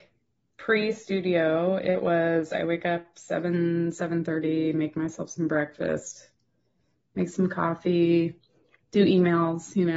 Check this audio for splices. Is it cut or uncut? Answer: uncut